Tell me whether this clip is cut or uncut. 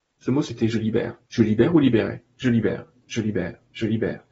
cut